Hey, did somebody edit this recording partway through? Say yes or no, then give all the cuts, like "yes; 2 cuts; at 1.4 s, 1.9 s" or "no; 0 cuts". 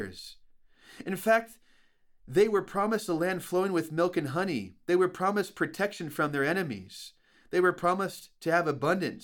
no; 0 cuts